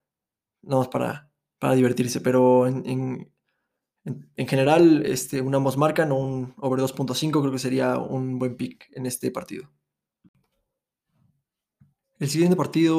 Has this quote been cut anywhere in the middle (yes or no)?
no